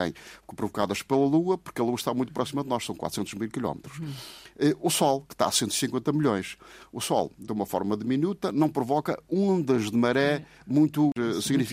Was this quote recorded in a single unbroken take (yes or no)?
yes